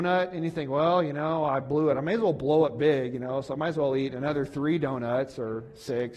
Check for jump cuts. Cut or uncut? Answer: uncut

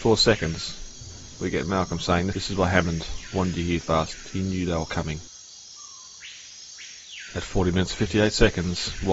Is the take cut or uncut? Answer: cut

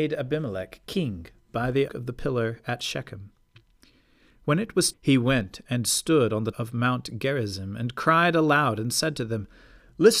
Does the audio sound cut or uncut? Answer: cut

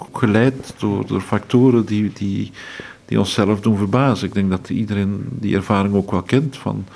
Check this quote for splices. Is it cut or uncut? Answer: uncut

